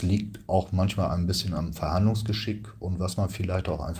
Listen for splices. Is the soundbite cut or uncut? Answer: uncut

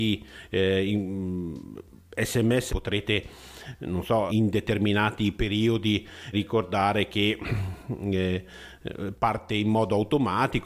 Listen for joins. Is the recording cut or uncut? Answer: cut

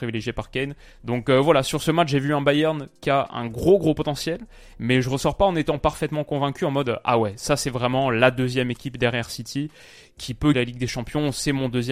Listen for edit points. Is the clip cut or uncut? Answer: cut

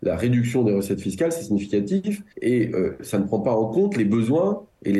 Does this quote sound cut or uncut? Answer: cut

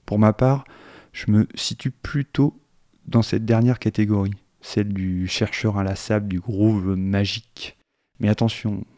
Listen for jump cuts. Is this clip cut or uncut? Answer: uncut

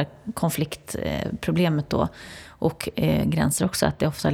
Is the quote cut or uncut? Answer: uncut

